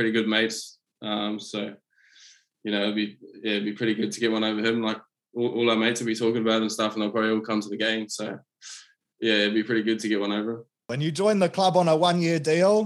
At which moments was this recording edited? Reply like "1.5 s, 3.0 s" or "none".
none